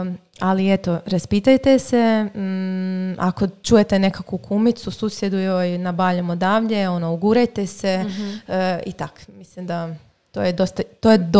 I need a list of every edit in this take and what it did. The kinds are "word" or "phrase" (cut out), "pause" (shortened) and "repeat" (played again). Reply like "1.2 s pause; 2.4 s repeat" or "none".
none